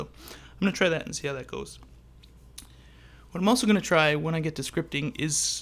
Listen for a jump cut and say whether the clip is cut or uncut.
uncut